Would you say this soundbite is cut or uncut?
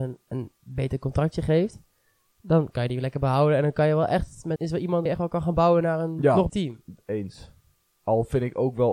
cut